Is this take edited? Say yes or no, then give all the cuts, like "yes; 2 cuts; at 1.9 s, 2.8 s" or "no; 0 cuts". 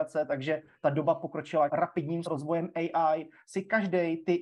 yes; 2 cuts; at 1.7 s, 2.2 s